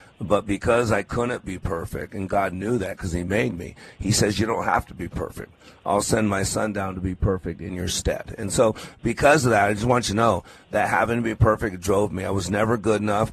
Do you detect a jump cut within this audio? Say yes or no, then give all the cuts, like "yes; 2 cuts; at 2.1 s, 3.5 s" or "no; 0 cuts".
no; 0 cuts